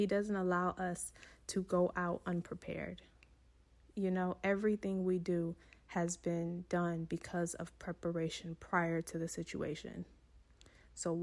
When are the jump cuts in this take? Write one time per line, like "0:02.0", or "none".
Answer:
none